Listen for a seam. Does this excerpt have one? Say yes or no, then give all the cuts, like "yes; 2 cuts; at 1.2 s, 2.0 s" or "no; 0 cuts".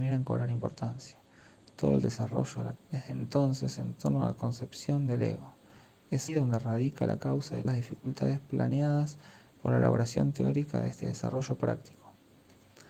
yes; 3 cuts; at 2.8 s, 6.3 s, 7.6 s